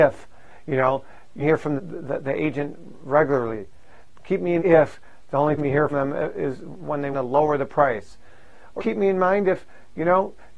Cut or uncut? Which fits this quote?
cut